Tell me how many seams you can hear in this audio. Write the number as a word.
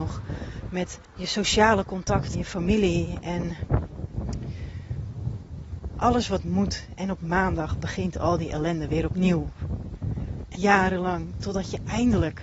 three